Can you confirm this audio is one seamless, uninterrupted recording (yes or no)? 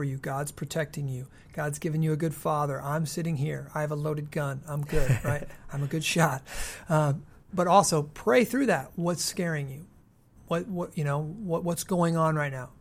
yes